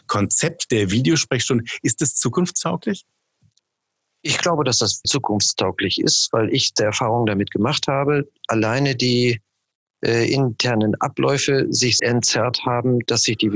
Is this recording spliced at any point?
yes; 3 cuts; at 5.0 s, 6.8 s, 12.0 s

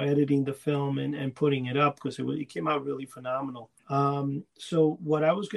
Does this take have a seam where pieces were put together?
yes; 1 cut; at 3.8 s

